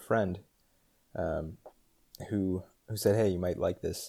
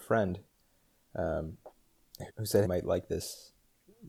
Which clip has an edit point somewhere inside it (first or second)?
second